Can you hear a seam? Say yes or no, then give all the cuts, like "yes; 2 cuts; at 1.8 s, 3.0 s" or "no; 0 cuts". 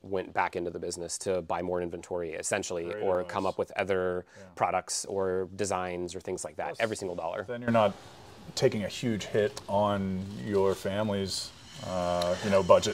no; 0 cuts